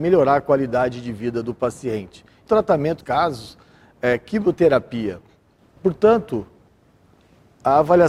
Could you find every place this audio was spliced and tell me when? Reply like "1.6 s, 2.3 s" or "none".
2.5 s, 3.0 s